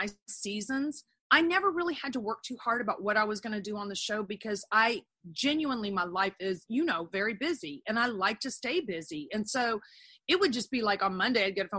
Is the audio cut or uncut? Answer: uncut